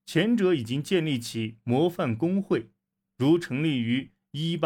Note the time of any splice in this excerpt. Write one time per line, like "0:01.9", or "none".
none